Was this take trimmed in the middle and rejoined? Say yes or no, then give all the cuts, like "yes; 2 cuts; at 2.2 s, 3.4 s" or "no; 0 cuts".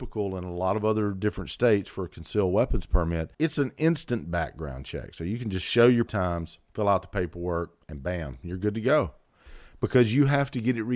yes; 3 cuts; at 3.3 s, 6.1 s, 6.7 s